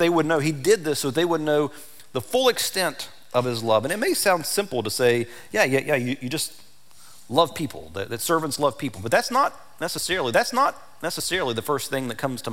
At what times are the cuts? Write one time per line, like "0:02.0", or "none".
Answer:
0:10.3